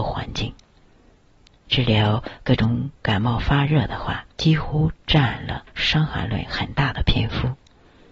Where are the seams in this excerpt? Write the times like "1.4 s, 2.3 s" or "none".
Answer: 3.0 s, 4.3 s, 5.7 s